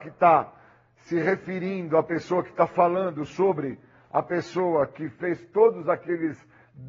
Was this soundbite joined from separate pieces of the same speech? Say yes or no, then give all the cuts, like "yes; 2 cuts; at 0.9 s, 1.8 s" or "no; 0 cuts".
no; 0 cuts